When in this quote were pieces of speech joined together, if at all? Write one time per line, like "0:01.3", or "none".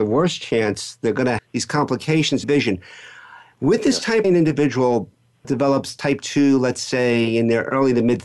0:01.4
0:02.4
0:04.2
0:05.4